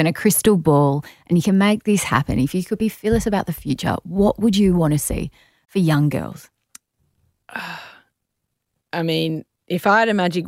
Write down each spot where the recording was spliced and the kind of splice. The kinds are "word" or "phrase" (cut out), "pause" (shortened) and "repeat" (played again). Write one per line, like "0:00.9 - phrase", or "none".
none